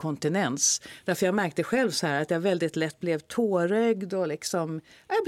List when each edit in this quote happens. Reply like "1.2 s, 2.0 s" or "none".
none